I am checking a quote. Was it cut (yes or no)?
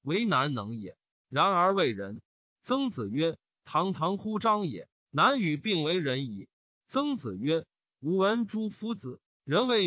yes